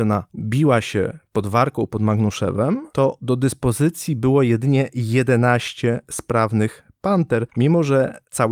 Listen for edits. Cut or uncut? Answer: uncut